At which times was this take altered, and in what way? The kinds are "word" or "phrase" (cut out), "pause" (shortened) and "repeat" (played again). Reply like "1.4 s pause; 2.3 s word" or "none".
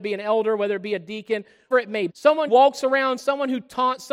1.7 s word; 2.1 s word; 2.5 s word